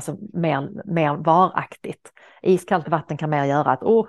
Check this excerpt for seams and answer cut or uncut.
uncut